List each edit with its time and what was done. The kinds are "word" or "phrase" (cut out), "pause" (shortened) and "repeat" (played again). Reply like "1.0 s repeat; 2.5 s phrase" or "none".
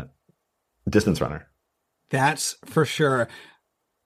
none